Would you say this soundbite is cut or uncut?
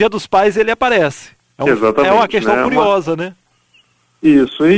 cut